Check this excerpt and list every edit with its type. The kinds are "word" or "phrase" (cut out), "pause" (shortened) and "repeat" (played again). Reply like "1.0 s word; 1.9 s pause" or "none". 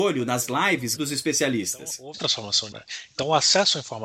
1.0 s word; 2.1 s word; 2.7 s word